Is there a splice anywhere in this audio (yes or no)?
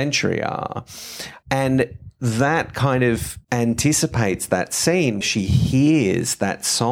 yes